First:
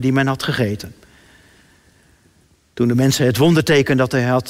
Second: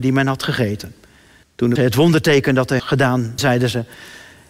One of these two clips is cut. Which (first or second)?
second